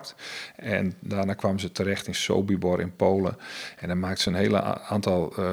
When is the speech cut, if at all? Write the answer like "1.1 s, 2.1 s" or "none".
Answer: none